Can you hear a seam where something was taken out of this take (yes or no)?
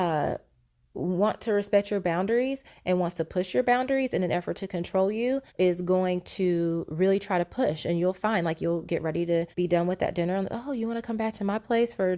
yes